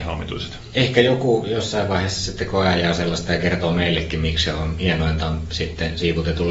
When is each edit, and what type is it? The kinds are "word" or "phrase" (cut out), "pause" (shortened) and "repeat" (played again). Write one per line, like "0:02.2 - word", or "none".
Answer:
none